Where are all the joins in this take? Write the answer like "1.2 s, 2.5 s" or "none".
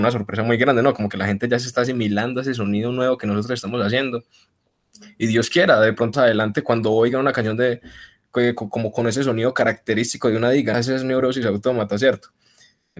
6.1 s, 10.7 s

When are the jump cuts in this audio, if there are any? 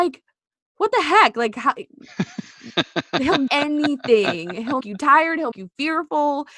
3.5 s, 4.8 s, 5.5 s

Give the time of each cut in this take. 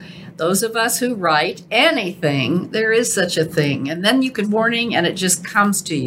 4.4 s

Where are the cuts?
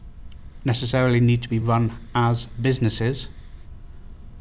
none

